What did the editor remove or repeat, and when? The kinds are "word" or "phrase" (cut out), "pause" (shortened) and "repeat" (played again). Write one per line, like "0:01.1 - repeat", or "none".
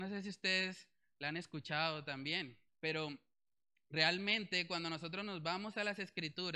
0:02.7 - pause